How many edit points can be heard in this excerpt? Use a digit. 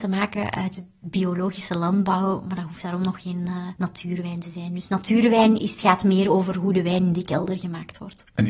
2